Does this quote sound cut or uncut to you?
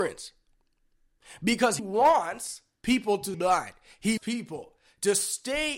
cut